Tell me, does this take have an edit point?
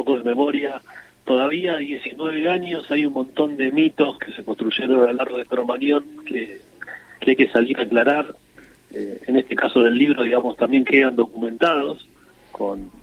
no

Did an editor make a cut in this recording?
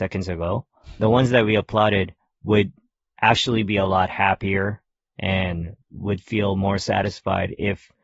yes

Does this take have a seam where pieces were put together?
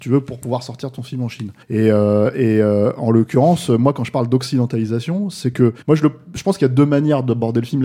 yes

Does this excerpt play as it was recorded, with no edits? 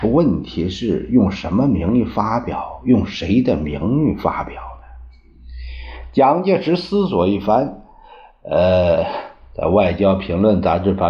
yes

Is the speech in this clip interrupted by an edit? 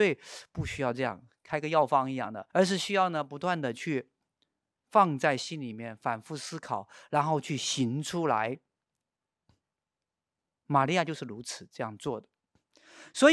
yes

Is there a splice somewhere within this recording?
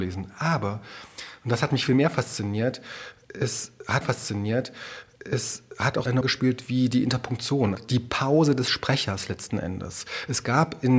yes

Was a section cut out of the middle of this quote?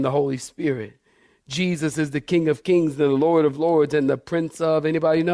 no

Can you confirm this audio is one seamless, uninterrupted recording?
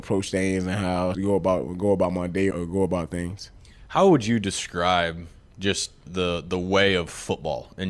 no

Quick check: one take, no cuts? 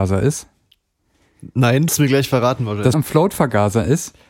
no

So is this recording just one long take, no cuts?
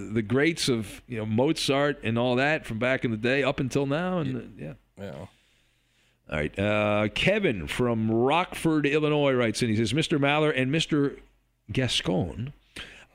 yes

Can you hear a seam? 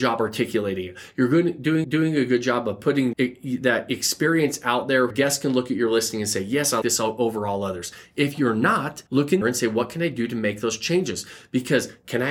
yes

